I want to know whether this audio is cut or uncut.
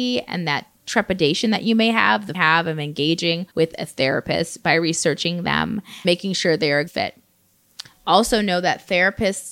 cut